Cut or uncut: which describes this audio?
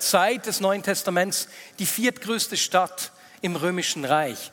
uncut